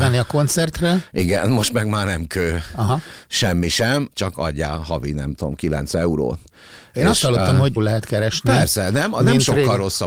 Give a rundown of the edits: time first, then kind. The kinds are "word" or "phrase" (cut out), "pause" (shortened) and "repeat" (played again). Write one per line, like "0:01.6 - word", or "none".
0:04.1 - word
0:07.8 - phrase